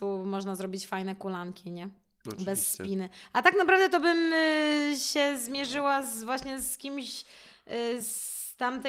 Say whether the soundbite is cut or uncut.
uncut